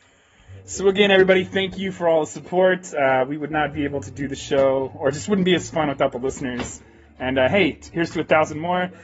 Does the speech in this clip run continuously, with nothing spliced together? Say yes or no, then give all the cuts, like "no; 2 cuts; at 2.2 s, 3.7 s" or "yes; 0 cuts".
yes; 0 cuts